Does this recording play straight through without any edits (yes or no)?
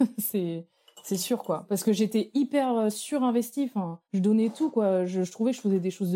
no